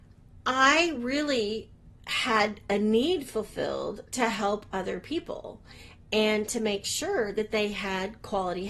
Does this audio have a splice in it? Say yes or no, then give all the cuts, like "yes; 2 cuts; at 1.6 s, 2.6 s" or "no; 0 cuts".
no; 0 cuts